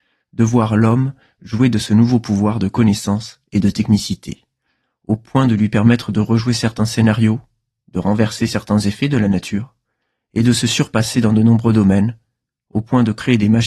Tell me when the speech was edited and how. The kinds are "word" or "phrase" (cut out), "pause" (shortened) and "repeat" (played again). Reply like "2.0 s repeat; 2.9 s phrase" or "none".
none